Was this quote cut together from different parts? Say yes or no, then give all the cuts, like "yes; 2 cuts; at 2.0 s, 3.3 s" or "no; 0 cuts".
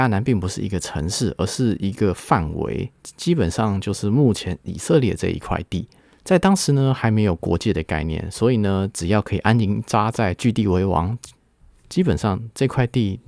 yes; 1 cut; at 6.0 s